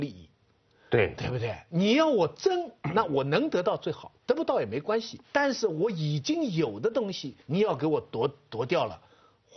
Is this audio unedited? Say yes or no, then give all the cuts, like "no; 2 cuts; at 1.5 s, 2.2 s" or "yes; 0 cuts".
no; 2 cuts; at 5.2 s, 7.4 s